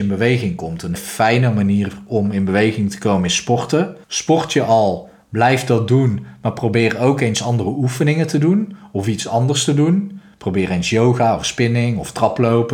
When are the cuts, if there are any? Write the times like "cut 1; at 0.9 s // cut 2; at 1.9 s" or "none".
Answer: cut 1; at 1.0 s // cut 2; at 4.0 s